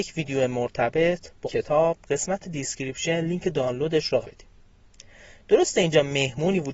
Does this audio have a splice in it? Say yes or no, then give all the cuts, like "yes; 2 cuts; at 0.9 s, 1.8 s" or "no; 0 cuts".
yes; 3 cuts; at 1.4 s, 2.0 s, 4.2 s